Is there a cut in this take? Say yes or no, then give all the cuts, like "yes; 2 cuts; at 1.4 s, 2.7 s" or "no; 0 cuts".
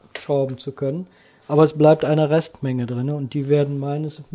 no; 0 cuts